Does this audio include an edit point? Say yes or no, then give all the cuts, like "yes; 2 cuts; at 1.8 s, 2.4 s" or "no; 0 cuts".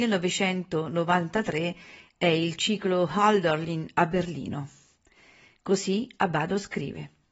no; 0 cuts